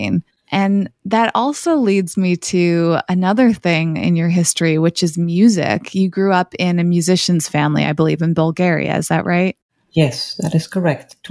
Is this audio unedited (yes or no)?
yes